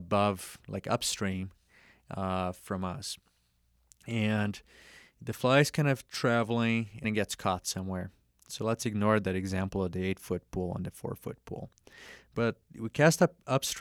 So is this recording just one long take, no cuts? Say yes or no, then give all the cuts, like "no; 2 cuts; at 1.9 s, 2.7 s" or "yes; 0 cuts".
no; 1 cut; at 7.0 s